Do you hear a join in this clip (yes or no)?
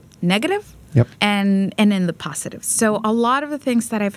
yes